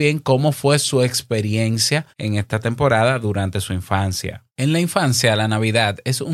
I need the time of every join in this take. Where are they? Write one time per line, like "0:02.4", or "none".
0:02.1
0:04.5